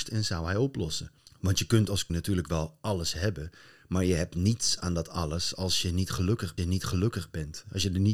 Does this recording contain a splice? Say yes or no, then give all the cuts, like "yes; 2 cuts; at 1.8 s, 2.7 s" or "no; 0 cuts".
yes; 2 cuts; at 2.1 s, 6.6 s